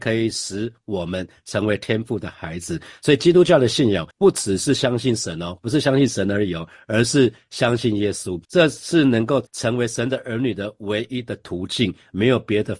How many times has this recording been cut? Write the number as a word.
three